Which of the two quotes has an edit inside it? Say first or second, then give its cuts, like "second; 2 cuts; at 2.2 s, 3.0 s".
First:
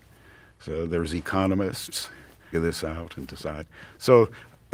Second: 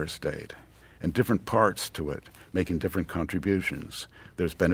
first; 1 cut; at 2.5 s